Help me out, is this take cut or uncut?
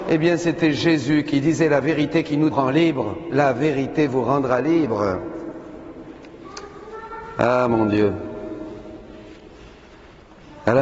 cut